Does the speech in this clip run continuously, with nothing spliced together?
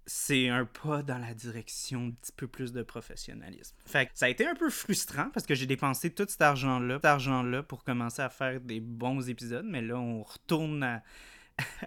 no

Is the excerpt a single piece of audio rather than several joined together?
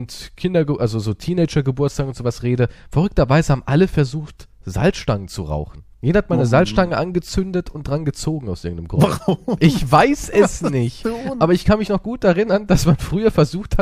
no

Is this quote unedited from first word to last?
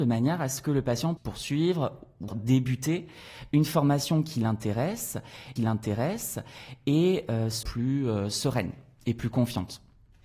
no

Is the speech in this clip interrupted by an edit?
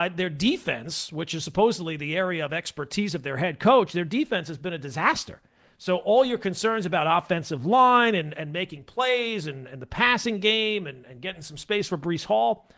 no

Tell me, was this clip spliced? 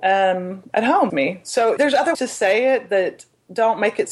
yes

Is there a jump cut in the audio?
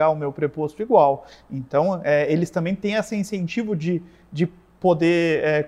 no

